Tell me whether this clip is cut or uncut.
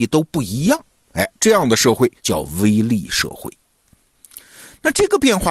cut